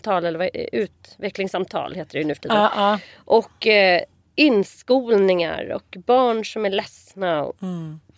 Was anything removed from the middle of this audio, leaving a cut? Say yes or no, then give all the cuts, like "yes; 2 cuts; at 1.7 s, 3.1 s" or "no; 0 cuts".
no; 0 cuts